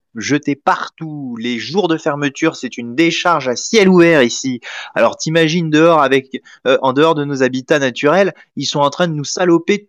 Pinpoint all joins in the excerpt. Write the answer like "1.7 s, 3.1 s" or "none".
none